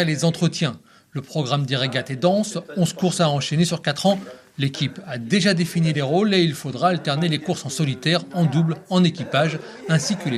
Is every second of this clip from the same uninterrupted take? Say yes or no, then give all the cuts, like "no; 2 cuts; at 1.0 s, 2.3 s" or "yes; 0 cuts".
yes; 0 cuts